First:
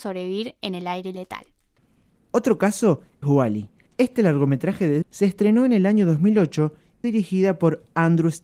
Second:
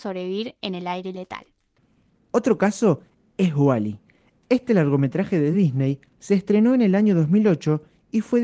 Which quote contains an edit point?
first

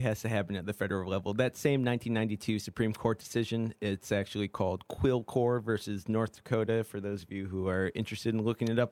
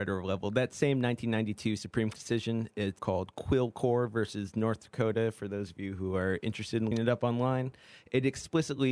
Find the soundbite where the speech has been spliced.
second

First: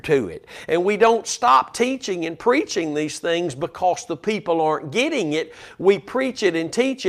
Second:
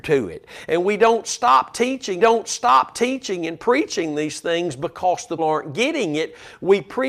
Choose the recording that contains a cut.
second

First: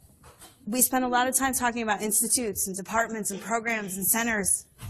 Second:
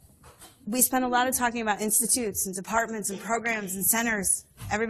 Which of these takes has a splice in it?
second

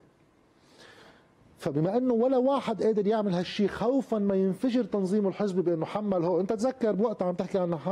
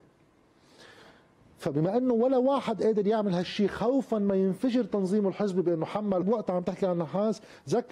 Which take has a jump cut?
second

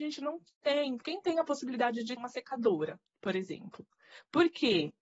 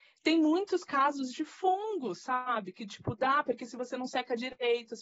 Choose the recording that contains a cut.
first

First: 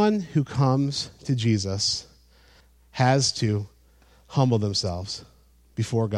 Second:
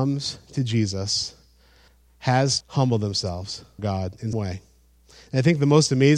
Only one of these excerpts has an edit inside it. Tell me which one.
second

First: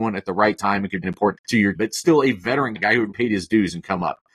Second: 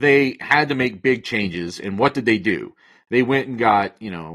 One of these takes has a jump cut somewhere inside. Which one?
first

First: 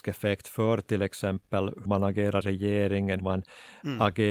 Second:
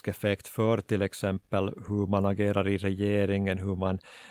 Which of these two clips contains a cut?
first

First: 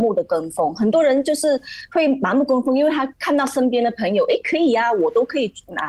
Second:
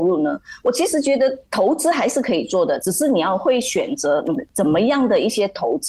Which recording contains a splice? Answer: second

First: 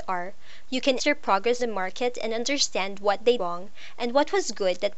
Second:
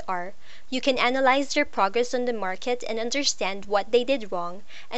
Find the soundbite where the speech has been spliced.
first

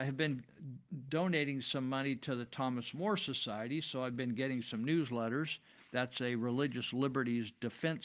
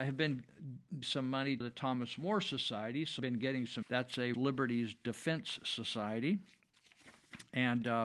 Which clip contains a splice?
second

